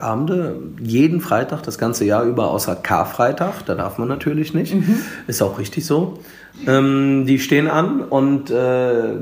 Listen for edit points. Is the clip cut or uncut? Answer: uncut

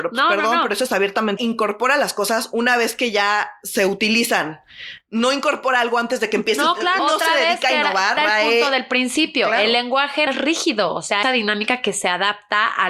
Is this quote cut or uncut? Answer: cut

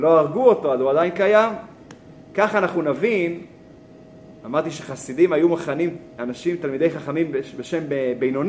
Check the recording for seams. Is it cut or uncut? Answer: uncut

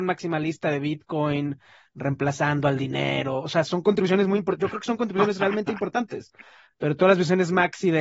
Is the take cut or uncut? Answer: uncut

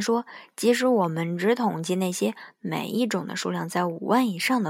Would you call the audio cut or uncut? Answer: uncut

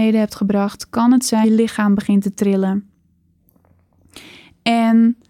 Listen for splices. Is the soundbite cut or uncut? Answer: cut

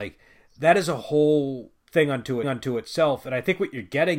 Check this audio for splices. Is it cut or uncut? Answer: cut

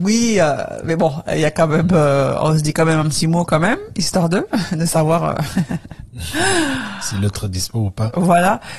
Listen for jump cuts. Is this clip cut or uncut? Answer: uncut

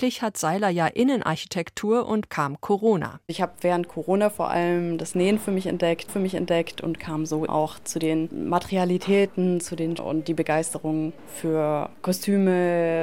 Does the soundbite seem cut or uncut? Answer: cut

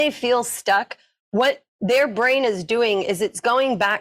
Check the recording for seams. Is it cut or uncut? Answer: uncut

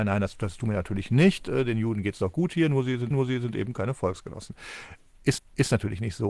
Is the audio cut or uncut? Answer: cut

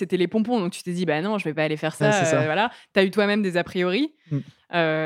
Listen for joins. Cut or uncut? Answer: uncut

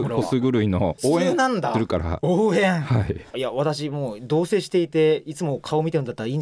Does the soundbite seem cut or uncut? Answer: cut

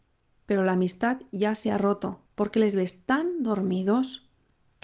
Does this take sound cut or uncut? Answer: cut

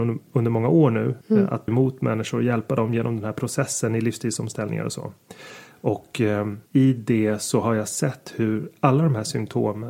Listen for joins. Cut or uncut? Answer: cut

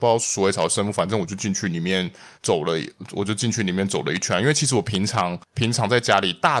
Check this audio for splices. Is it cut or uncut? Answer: cut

